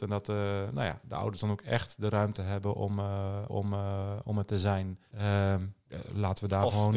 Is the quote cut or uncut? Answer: cut